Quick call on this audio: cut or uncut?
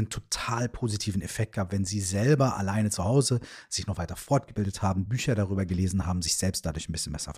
uncut